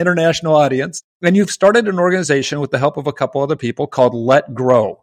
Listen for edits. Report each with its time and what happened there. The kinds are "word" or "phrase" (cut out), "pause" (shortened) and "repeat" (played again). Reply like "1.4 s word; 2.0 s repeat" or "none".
none